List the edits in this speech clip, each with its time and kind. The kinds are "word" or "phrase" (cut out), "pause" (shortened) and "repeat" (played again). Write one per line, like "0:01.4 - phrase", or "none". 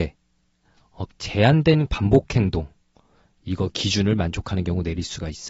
0:01.1 - word
0:01.9 - word